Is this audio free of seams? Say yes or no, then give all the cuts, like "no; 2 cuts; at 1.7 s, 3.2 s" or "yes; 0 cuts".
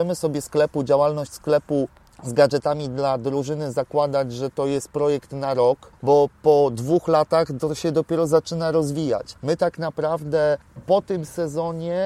yes; 0 cuts